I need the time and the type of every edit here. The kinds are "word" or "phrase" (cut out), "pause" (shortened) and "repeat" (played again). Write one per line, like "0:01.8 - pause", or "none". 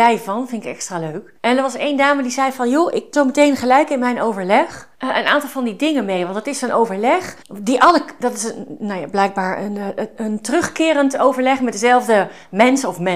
0:01.4 - pause
0:03.1 - word
0:04.9 - pause
0:07.4 - pause